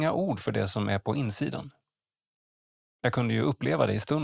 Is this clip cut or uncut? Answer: uncut